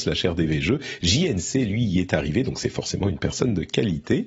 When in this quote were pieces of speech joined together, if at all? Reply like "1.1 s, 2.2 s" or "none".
none